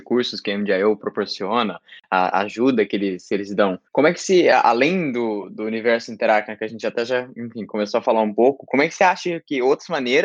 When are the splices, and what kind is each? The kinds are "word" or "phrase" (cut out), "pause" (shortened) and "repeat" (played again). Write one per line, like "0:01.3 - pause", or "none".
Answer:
0:03.9 - pause